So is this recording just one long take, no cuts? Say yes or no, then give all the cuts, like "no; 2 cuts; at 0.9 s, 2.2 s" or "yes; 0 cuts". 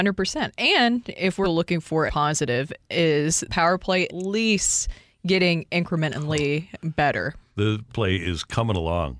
no; 5 cuts; at 1.4 s, 2.1 s, 3.5 s, 4.1 s, 7.9 s